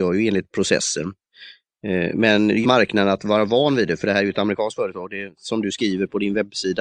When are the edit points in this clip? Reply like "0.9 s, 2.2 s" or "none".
2.6 s